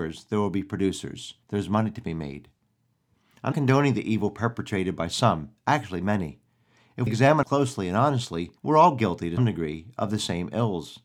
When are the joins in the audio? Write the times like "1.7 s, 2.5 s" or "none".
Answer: 1.4 s, 3.5 s, 5.6 s, 7.1 s, 7.4 s, 8.6 s, 9.4 s